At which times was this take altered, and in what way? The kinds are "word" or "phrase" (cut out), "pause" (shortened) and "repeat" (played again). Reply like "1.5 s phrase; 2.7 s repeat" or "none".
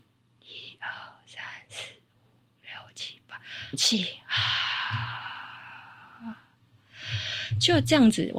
3.7 s word

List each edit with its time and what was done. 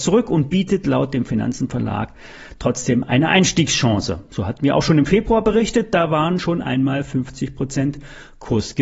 none

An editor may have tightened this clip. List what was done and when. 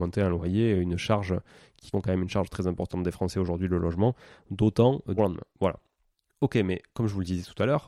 1.9 s word; 5.2 s word; 6.1 s pause

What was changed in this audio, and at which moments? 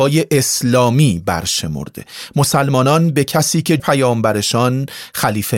3.8 s word

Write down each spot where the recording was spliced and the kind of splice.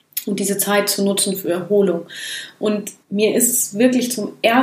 3.0 s pause

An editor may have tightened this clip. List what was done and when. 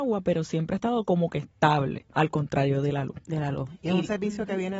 2.1 s pause

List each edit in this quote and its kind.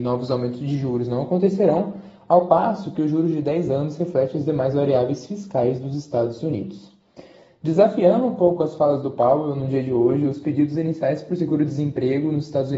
none

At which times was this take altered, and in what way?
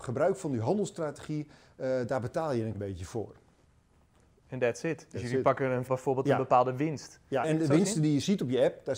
2.7 s word; 5.9 s phrase; 7.4 s word

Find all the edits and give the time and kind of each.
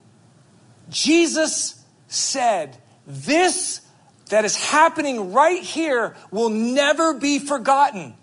none

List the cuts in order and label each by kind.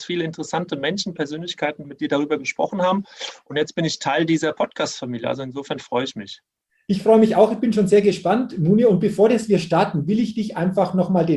1.8 s word

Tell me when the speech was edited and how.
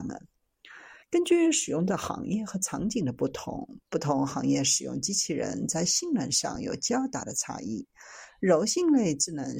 1.0 s pause; 3.8 s pause

